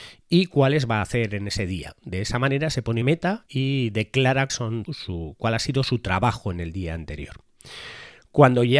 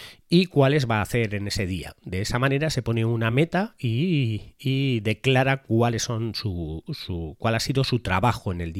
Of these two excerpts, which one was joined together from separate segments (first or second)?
first